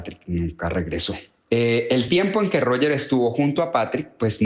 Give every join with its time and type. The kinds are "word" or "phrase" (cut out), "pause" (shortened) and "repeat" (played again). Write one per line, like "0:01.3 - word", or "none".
none